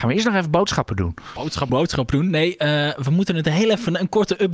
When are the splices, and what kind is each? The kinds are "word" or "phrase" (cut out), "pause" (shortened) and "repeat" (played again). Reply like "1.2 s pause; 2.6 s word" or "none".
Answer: 1.7 s word